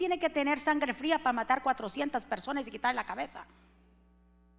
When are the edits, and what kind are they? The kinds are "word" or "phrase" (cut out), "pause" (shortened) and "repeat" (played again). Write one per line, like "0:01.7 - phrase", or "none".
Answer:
none